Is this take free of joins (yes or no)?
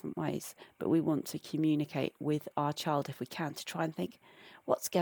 yes